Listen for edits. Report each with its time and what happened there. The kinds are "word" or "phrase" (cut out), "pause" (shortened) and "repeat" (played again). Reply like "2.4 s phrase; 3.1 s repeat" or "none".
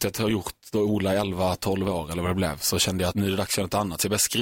3.1 s word